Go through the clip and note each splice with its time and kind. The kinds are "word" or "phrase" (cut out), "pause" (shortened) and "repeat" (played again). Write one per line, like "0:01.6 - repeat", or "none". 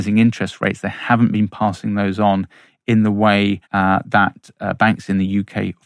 0:03.6 - pause